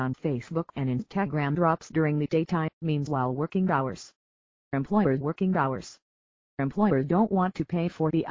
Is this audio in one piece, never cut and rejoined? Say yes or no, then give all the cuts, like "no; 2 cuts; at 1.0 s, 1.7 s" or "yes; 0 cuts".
no; 2 cuts; at 2.7 s, 5.2 s